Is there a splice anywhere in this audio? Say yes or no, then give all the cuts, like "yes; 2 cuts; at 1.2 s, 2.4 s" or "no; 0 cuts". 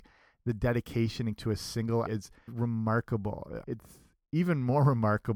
yes; 4 cuts; at 1.4 s, 2.1 s, 2.5 s, 3.6 s